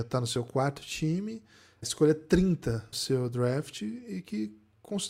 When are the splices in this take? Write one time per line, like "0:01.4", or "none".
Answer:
0:01.8
0:02.9